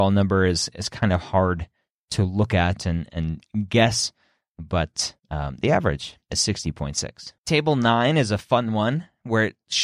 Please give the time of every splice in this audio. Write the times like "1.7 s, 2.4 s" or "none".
5.2 s, 6.2 s, 7.4 s